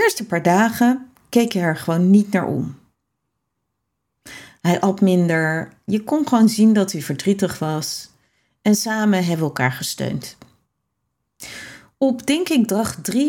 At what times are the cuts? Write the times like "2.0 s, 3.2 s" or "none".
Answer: none